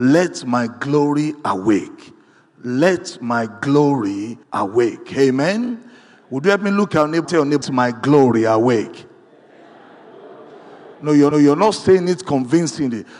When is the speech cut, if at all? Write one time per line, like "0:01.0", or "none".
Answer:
0:04.4
0:07.2
0:07.6
0:11.3